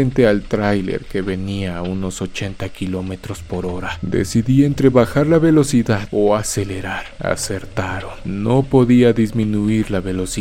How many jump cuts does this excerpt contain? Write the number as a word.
zero